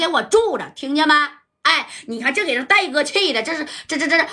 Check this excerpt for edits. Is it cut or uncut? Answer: uncut